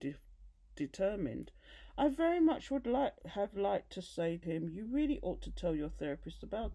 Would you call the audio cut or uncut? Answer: cut